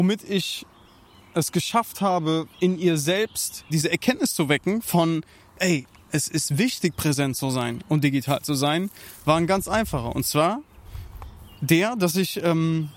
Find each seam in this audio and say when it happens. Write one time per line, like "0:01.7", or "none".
0:02.5
0:03.7